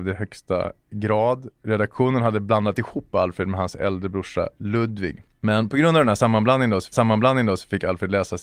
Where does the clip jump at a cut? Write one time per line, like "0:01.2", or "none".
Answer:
0:06.9